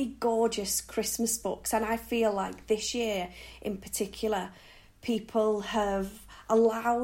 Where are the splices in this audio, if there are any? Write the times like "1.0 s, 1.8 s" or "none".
none